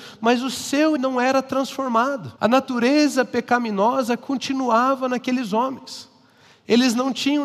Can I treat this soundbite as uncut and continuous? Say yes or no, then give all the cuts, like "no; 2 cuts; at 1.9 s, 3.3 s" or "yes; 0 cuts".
no; 2 cuts; at 1.0 s, 2.4 s